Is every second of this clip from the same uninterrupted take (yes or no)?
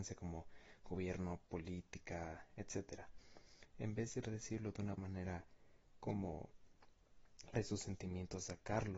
no